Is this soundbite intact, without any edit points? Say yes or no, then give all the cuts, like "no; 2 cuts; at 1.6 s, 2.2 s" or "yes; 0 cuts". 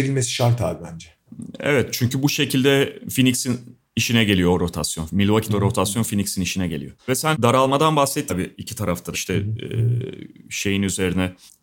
no; 5 cuts; at 5.5 s, 7.0 s, 7.3 s, 8.3 s, 9.1 s